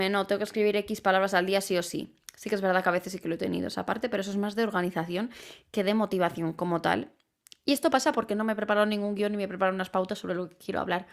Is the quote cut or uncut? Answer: uncut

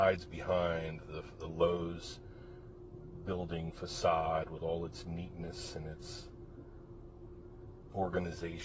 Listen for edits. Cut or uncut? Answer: uncut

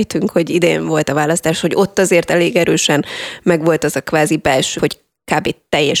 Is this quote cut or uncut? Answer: cut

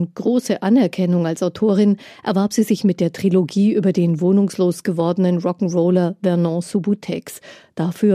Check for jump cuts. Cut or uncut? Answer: uncut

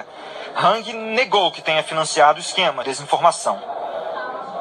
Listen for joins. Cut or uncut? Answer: cut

